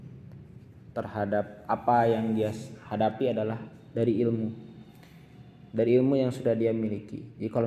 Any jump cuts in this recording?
yes; 1 cut; at 5.7 s

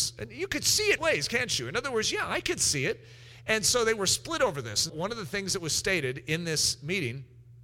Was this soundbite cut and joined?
yes; 2 cuts; at 1.0 s, 4.9 s

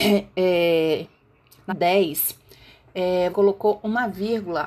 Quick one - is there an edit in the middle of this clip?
yes; 2 cuts; at 1.7 s, 3.3 s

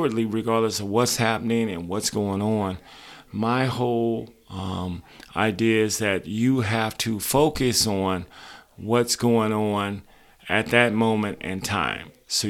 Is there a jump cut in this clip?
no; 0 cuts

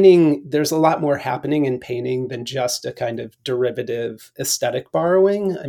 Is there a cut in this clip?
no; 0 cuts

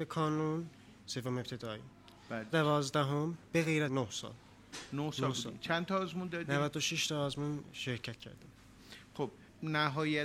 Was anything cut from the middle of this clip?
yes; 3 cuts; at 1.0 s, 2.5 s, 3.9 s

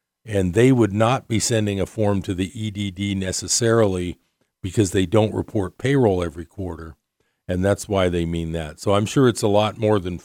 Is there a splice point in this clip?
no; 0 cuts

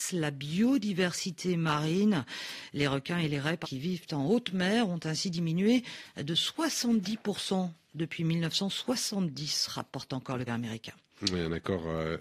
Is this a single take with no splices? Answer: no; 2 cuts; at 3.6 s, 10.5 s

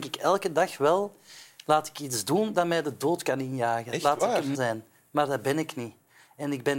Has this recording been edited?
yes; 1 cut; at 4.5 s

